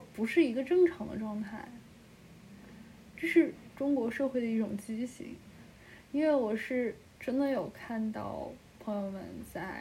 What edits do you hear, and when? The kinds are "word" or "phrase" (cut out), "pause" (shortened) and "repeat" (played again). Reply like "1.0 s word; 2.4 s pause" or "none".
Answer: none